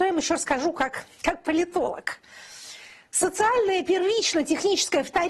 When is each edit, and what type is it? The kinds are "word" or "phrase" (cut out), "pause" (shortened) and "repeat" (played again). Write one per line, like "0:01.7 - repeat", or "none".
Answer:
none